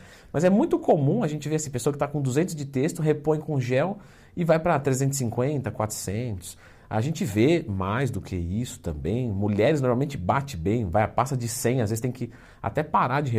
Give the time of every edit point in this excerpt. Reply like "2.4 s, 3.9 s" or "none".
none